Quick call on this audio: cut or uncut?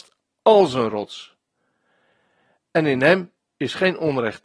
uncut